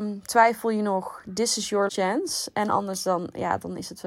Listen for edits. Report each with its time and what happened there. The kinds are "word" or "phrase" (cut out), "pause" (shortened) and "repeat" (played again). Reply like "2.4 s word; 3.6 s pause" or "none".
1.9 s word